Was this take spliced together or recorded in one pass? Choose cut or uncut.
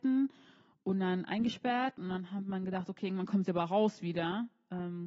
uncut